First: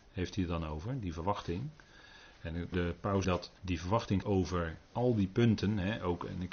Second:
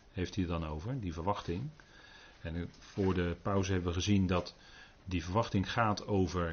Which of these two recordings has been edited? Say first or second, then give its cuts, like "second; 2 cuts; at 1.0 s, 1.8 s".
first; 5 cuts; at 2.7 s, 3.2 s, 3.6 s, 4.2 s, 4.9 s